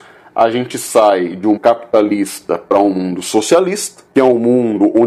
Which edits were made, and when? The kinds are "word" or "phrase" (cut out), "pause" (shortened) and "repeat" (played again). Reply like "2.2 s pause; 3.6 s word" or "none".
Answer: 1.6 s word; 4.1 s pause